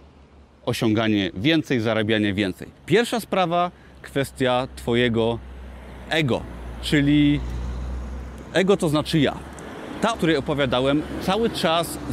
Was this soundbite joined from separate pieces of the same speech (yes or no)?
yes